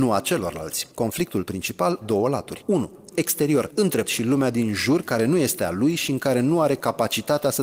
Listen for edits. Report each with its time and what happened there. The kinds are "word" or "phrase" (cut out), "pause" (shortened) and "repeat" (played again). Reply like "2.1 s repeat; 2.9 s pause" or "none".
0.9 s pause; 2.0 s word; 3.1 s word; 4.0 s word